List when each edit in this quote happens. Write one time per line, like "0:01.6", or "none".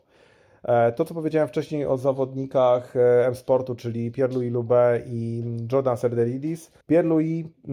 0:06.8